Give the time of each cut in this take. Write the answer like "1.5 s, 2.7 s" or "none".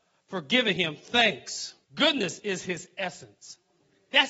1.8 s